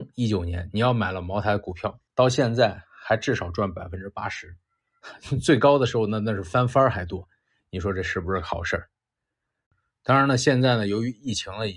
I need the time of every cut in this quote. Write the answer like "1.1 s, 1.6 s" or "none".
2.1 s